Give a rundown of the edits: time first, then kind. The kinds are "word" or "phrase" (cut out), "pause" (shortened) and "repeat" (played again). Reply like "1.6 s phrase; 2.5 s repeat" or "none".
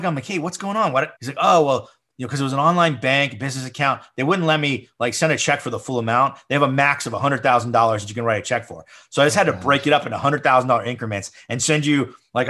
1.2 s pause